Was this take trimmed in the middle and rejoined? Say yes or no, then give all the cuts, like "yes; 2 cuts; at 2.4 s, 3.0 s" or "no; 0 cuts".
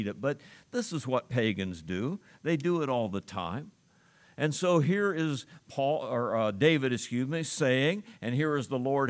no; 0 cuts